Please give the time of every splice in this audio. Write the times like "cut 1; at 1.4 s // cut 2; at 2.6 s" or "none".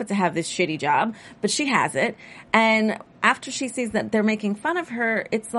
none